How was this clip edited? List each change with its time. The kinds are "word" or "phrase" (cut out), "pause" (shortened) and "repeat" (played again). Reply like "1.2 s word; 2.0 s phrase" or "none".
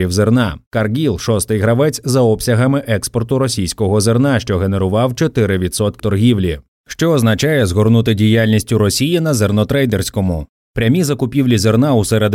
6.0 s word